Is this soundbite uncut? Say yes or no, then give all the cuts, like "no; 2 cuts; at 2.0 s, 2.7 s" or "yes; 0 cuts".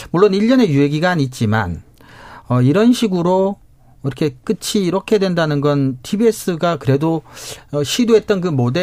yes; 0 cuts